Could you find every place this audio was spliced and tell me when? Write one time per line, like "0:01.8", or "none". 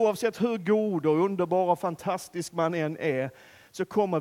none

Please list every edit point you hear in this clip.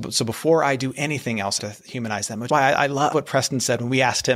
0:01.6
0:02.5
0:03.1

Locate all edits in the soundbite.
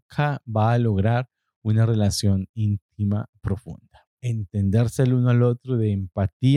0:04.1

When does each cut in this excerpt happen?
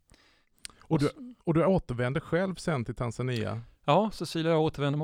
0:01.4

